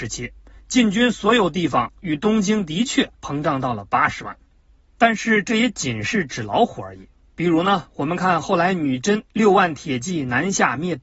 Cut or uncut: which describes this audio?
cut